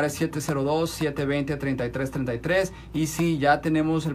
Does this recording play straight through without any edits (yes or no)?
yes